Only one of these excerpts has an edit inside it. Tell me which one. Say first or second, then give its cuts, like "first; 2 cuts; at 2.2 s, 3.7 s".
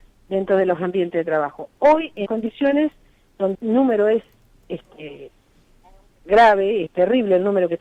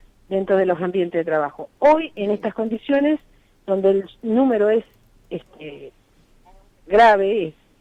first; 3 cuts; at 2.3 s, 3.5 s, 6.9 s